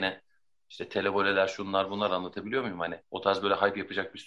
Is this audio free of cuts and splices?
no; 1 cut; at 3.0 s

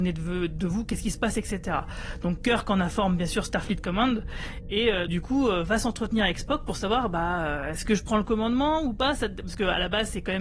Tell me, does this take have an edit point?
yes; 1 cut; at 5.1 s

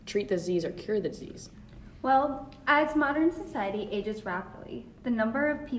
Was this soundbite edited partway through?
no; 0 cuts

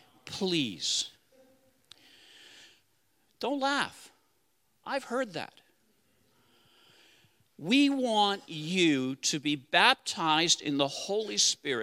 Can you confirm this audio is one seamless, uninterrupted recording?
yes; 0 cuts

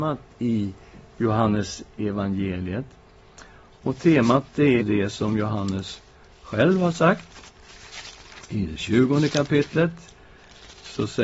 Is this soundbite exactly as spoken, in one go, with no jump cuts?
no; 1 cut; at 4.8 s

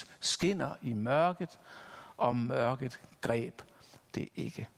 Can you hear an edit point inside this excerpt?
no; 0 cuts

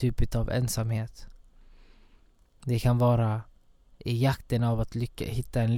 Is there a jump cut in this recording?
no; 0 cuts

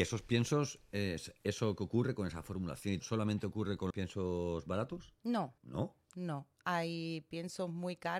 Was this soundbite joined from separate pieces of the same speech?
yes; 3 cuts; at 3.0 s, 3.9 s, 5.6 s

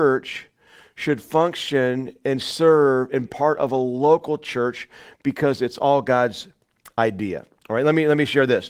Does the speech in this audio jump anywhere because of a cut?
yes; 1 cut; at 3.2 s

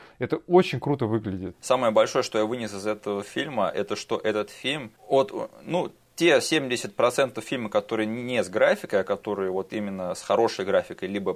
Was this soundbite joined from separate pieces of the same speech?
no; 0 cuts

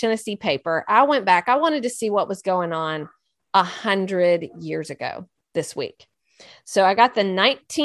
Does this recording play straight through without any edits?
yes; 0 cuts

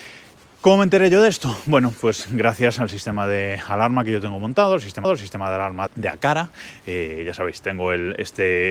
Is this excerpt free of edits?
no; 2 cuts; at 5.0 s, 5.9 s

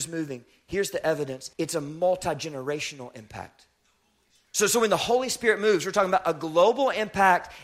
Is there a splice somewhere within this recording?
yes; 1 cut; at 1.5 s

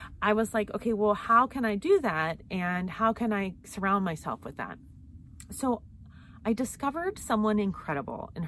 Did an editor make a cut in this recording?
no; 0 cuts

